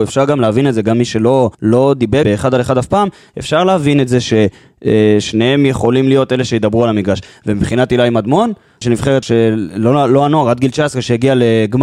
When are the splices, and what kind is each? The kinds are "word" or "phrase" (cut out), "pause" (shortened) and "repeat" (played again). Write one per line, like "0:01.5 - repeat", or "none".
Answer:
0:01.5 - pause
0:02.2 - word
0:08.8 - word
0:09.2 - word